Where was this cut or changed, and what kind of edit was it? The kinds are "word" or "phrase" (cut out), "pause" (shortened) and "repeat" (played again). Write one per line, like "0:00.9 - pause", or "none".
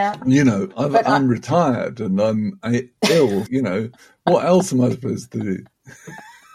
0:03.5 - word